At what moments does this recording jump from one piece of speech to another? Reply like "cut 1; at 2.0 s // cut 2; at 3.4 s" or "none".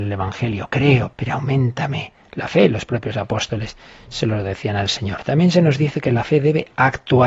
cut 1; at 1.1 s